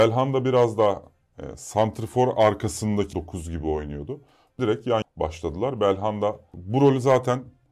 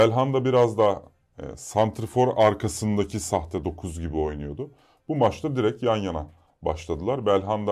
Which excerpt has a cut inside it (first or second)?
first